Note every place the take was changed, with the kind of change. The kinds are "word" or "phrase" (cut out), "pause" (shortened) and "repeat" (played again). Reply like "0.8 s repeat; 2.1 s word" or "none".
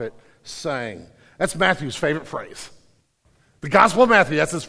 none